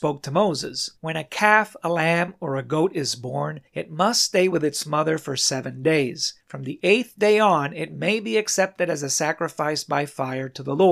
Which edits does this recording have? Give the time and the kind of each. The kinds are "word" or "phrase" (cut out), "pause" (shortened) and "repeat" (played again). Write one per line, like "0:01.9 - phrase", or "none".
0:01.0 - pause
0:03.7 - pause
0:06.4 - pause